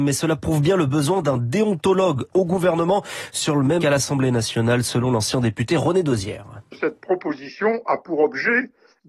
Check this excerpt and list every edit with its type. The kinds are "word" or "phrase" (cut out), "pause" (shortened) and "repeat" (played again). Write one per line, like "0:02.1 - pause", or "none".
0:03.8 - word